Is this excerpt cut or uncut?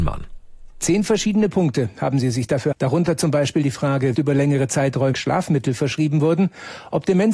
cut